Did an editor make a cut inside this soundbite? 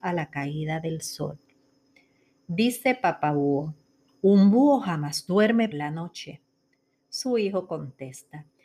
yes; 2 cuts; at 4.1 s, 5.7 s

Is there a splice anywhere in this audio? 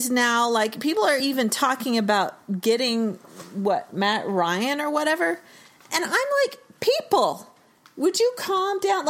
no; 0 cuts

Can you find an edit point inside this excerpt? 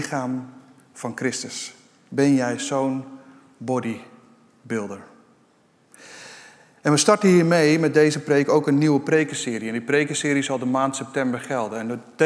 no; 0 cuts

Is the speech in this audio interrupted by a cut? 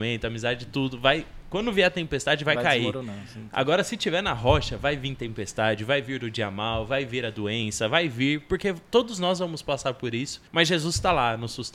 yes; 1 cut; at 10.5 s

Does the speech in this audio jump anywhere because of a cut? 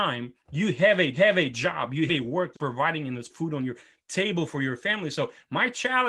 yes; 4 cuts; at 1.1 s, 2.1 s, 2.5 s, 3.3 s

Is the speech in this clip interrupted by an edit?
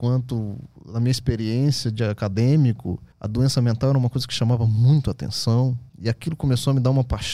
yes; 2 cuts; at 3.1 s, 5.9 s

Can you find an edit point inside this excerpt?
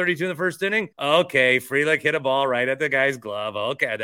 yes; 1 cut; at 0.9 s

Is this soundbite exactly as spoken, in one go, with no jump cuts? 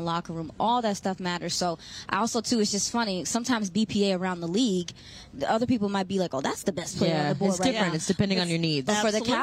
yes; 0 cuts

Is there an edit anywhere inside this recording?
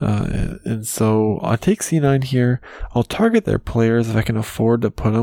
no; 0 cuts

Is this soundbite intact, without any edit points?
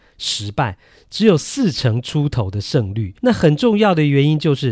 no; 1 cut; at 3.2 s

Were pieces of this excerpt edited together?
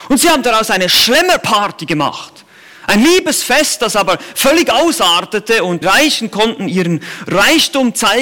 yes; 1 cut; at 5.8 s

